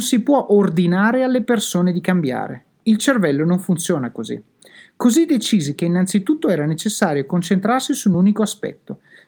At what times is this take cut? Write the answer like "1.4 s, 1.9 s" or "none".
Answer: none